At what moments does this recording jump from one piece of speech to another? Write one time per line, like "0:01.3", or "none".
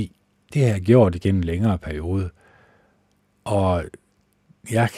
none